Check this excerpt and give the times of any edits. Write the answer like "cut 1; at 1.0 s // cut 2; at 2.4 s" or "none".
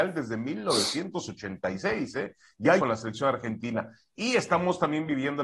cut 1; at 2.8 s